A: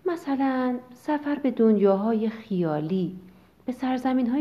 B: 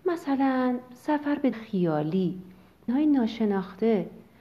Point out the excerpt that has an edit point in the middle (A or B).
B